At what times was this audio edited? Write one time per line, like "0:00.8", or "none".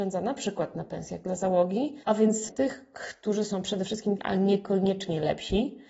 0:02.0
0:02.5
0:04.2